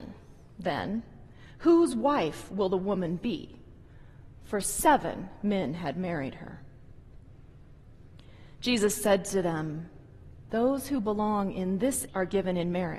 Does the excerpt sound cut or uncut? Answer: cut